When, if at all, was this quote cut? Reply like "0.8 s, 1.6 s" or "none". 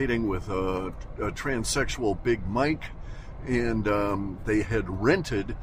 none